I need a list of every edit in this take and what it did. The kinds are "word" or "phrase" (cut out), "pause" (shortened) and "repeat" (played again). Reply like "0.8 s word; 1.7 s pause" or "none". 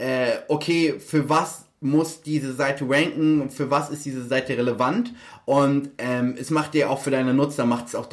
none